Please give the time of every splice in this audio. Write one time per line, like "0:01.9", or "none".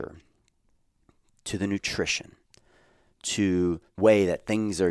0:04.0